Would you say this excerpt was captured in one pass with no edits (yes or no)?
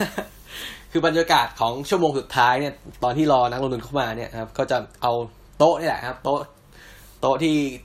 yes